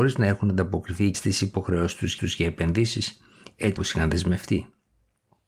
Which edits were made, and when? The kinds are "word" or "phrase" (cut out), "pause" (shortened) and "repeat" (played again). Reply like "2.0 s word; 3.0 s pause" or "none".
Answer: 1.1 s word; 2.2 s repeat; 3.8 s word